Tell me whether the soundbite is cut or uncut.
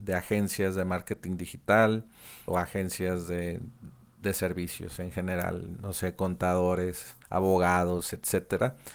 cut